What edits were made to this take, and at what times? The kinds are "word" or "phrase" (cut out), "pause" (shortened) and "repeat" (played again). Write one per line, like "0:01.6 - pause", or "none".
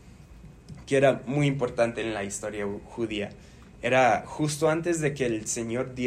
none